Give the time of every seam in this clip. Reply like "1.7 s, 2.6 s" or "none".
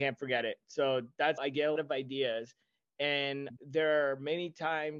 1.4 s, 1.8 s, 3.6 s